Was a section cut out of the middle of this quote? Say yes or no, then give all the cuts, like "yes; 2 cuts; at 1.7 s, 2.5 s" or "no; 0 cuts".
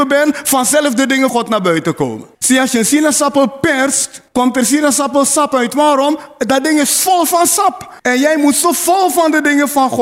yes; 4 cuts; at 1.3 s, 2.3 s, 4.3 s, 8.0 s